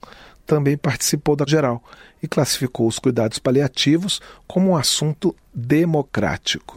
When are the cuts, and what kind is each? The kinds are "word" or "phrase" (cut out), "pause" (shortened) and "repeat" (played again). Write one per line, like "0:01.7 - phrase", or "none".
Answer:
0:01.5 - word